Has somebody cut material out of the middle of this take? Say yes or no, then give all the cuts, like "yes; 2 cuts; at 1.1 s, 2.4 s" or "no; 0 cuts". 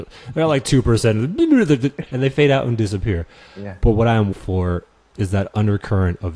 yes; 1 cut; at 4.3 s